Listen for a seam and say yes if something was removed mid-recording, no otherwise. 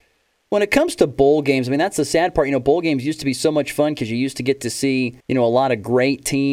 yes